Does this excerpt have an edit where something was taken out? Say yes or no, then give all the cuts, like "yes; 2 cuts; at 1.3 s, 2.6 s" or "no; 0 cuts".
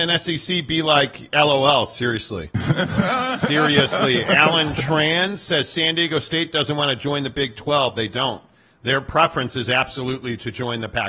no; 0 cuts